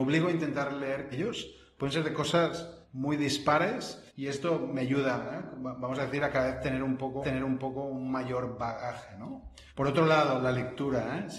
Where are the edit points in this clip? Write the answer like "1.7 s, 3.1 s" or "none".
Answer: 1.1 s, 2.8 s, 4.1 s, 7.2 s, 9.7 s